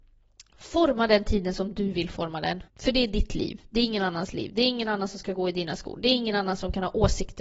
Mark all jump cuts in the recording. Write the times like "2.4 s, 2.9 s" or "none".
2.7 s